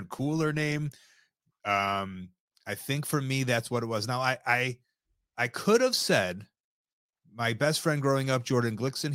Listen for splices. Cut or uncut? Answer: uncut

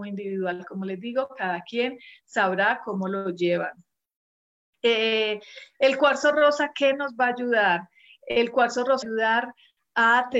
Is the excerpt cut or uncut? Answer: cut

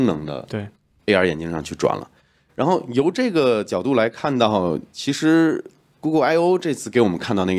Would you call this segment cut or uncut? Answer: uncut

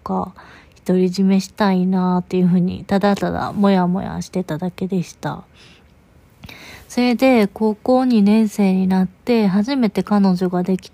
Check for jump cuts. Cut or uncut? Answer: uncut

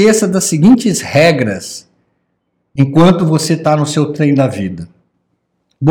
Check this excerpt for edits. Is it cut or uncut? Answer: uncut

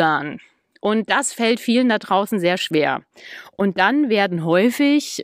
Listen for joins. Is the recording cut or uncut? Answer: uncut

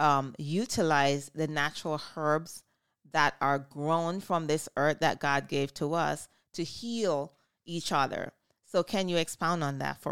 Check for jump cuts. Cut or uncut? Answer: uncut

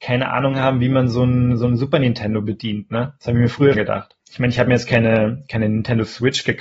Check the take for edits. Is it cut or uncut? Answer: cut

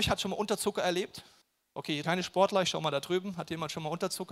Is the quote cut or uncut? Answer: cut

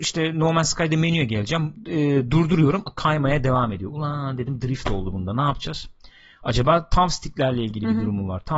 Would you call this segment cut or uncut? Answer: uncut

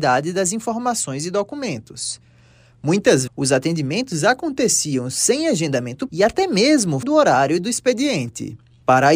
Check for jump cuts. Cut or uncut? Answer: cut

